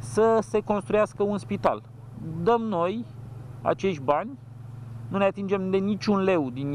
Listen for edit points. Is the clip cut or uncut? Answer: uncut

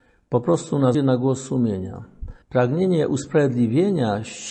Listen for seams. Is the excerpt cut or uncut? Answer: cut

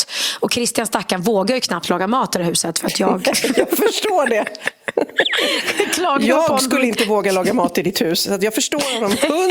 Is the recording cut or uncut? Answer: uncut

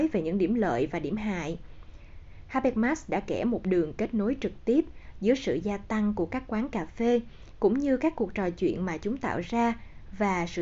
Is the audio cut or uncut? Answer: uncut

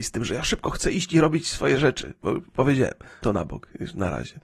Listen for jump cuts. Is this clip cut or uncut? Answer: cut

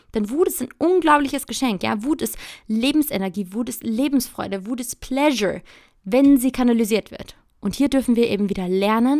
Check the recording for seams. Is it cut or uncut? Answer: uncut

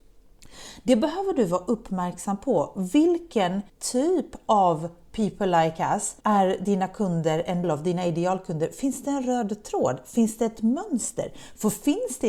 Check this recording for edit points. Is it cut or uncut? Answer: cut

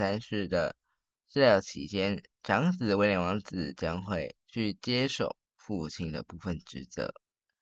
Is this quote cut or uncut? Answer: cut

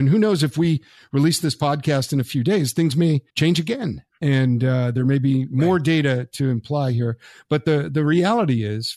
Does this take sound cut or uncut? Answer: cut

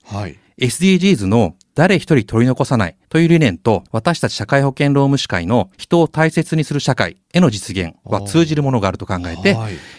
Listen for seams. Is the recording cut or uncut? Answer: cut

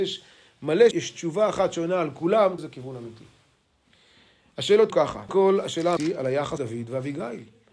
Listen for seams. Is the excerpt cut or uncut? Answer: cut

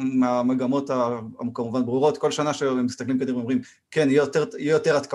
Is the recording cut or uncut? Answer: uncut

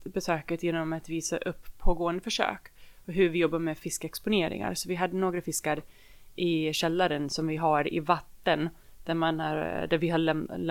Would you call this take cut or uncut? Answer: uncut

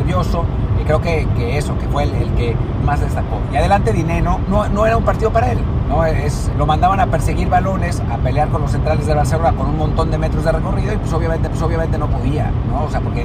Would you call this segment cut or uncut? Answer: cut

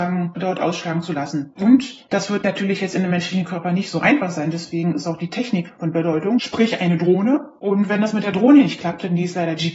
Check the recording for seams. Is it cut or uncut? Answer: uncut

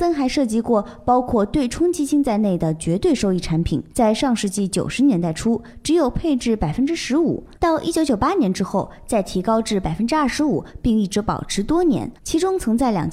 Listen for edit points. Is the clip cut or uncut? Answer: cut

